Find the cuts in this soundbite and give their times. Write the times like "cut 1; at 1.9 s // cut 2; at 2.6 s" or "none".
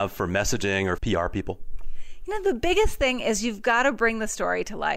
cut 1; at 1.0 s